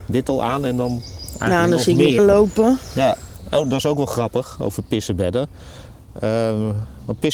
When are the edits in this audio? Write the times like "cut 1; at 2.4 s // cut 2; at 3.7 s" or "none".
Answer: cut 1; at 2.2 s

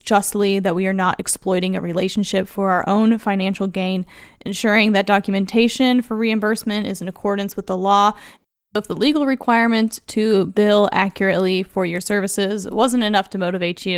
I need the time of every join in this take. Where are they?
none

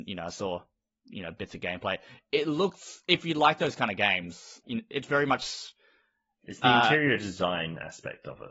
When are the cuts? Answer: cut 1; at 4.6 s

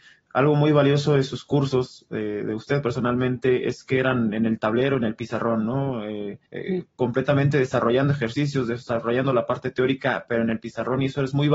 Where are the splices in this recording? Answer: cut 1; at 6.5 s

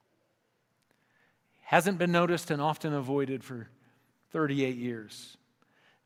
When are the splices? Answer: none

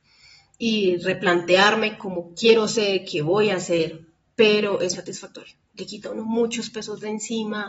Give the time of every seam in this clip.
cut 1; at 4.9 s

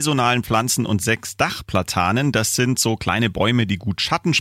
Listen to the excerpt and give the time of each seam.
none

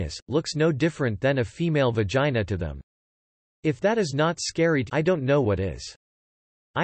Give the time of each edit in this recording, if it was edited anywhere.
cut 1; at 4.9 s

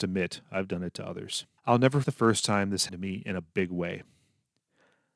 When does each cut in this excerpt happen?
cut 1; at 1.6 s // cut 2; at 2.0 s // cut 3; at 2.9 s

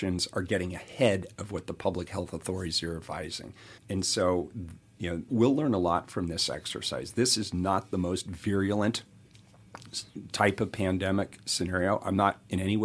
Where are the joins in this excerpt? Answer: cut 1; at 3.8 s // cut 2; at 5.3 s

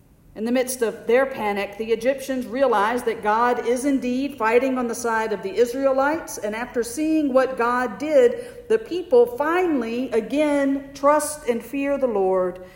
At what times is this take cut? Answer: none

